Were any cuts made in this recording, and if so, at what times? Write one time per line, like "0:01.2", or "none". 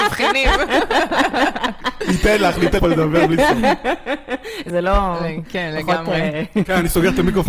0:02.8
0:04.7